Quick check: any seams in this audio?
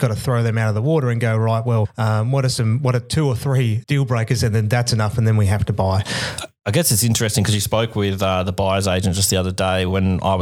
yes; 1 cut; at 3.8 s

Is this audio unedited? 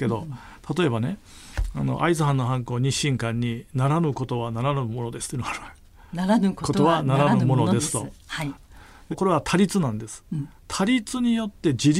no; 2 cuts; at 9.1 s, 10.6 s

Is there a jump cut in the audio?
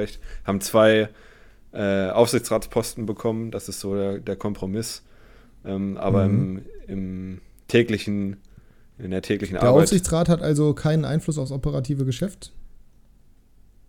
no; 0 cuts

